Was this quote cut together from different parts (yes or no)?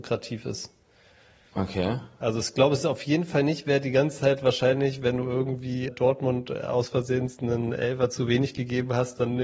yes